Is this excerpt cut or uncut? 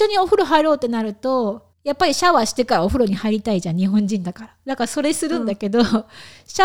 cut